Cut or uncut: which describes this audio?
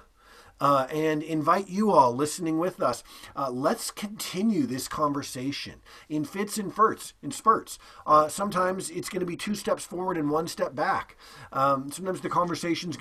uncut